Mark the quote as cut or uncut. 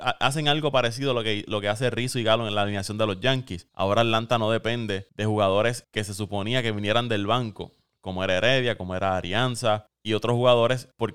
uncut